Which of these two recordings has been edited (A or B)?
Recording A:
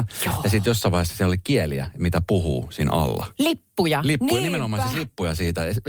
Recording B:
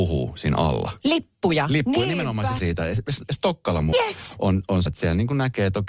B